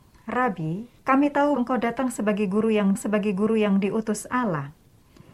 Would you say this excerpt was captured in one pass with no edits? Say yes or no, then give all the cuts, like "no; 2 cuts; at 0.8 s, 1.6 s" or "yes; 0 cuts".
no; 3 cuts; at 1.0 s, 1.6 s, 3.0 s